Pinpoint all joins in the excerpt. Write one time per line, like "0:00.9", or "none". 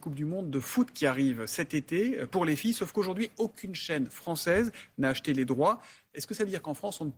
none